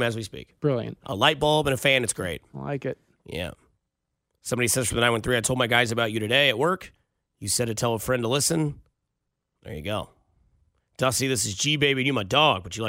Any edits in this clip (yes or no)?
no